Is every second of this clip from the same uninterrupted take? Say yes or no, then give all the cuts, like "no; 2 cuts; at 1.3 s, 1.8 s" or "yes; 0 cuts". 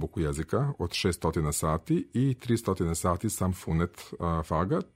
yes; 0 cuts